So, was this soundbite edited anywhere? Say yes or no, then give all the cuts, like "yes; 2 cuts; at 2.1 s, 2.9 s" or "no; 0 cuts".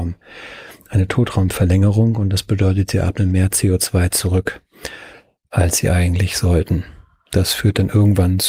no; 0 cuts